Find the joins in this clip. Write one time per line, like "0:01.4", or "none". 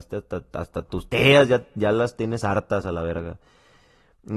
none